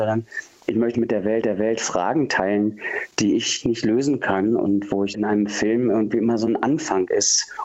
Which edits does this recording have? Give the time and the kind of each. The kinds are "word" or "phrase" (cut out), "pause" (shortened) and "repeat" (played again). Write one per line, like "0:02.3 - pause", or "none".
0:00.9 - word
0:01.4 - repeat
0:05.1 - phrase